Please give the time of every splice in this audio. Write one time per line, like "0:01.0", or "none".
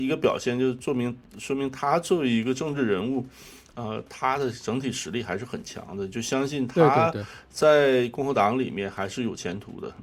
none